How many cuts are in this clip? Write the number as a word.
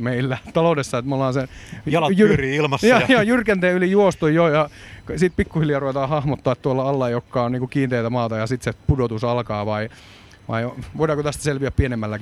zero